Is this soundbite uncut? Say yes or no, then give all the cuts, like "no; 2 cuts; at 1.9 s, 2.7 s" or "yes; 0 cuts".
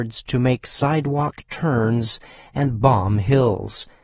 yes; 0 cuts